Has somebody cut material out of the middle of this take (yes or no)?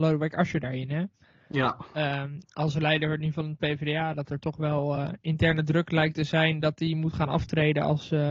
no